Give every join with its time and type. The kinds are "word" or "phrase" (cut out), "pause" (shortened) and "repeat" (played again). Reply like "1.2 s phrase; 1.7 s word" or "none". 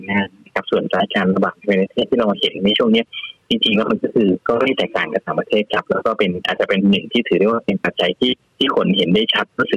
4.4 s pause; 8.5 s pause